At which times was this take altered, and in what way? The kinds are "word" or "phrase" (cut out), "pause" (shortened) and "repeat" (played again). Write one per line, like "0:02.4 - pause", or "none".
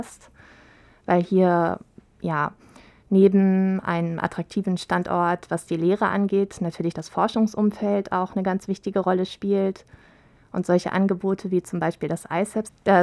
none